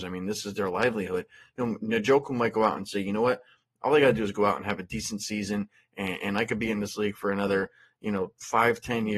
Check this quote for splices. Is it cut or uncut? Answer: uncut